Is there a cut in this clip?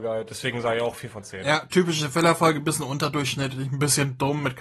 no; 0 cuts

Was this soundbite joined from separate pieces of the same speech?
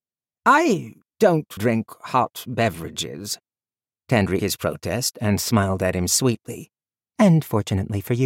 yes; 2 cuts; at 1.6 s, 4.4 s

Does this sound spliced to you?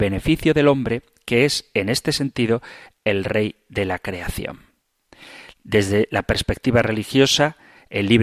no; 0 cuts

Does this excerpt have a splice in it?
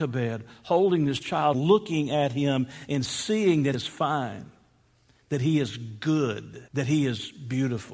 yes; 3 cuts; at 1.5 s, 3.7 s, 6.7 s

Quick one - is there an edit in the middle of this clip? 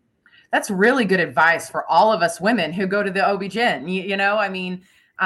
no; 0 cuts

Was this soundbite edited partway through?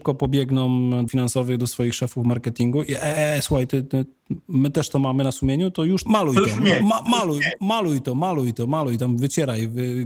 yes; 2 cuts; at 1.1 s, 6.1 s

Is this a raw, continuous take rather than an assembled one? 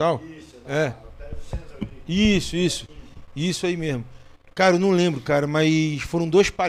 yes; 0 cuts

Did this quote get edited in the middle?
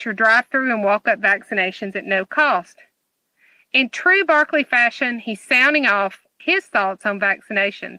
yes; 1 cut; at 6.4 s

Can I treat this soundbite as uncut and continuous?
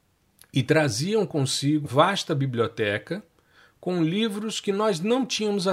no; 1 cut; at 1.8 s

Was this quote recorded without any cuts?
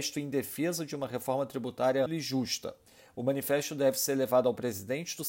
no; 1 cut; at 2.1 s

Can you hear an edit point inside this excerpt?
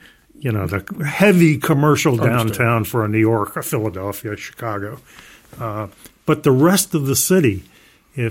no; 0 cuts

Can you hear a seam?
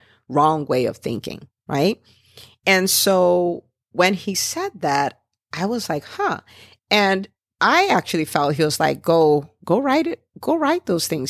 no; 0 cuts

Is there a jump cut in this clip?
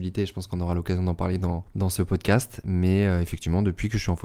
no; 0 cuts

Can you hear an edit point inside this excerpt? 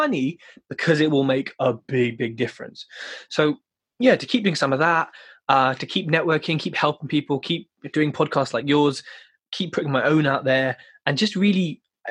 no; 0 cuts

